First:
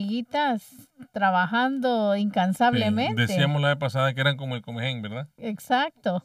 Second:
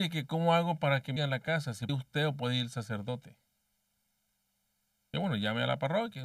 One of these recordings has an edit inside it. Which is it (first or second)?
second